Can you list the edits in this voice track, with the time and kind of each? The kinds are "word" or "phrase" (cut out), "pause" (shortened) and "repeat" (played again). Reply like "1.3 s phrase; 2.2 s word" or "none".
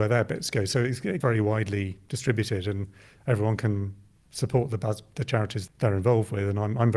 1.2 s word; 5.7 s word